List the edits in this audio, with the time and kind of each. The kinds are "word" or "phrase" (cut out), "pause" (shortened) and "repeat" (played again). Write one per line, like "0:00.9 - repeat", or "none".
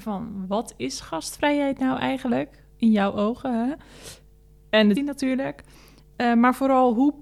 0:04.9 - word